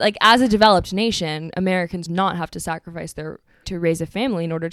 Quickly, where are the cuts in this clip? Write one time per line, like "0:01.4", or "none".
0:02.1
0:03.6